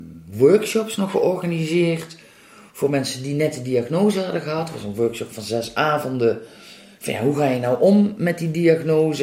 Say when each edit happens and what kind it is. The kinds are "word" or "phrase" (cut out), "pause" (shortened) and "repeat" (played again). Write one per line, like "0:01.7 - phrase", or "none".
none

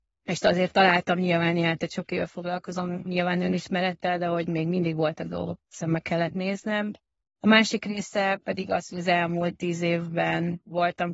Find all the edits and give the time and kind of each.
0:05.6 - word

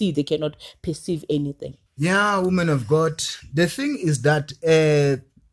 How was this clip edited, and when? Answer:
0:01.9 - pause

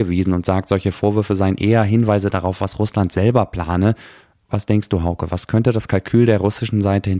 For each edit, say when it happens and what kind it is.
none

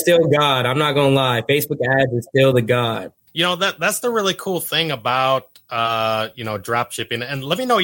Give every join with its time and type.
none

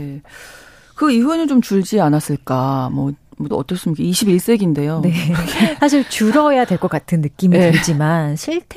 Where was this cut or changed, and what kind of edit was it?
0:03.5 - word

